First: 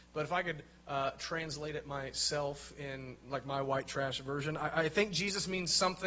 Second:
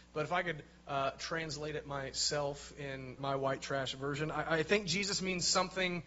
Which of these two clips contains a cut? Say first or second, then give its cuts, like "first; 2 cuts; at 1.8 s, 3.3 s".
second; 1 cut; at 3.2 s